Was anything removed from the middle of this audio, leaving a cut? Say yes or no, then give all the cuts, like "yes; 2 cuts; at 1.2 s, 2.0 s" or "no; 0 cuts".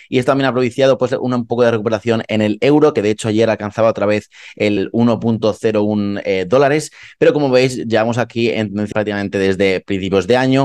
yes; 2 cuts; at 4.8 s, 8.9 s